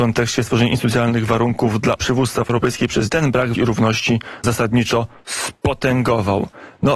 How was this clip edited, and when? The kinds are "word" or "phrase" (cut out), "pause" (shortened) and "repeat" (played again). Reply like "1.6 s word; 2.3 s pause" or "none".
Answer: 2.0 s word; 2.5 s word; 3.1 s word; 3.5 s word; 4.4 s phrase